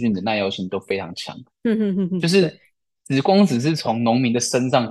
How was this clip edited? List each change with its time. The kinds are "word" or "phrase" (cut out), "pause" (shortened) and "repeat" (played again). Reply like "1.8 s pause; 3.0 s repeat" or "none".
none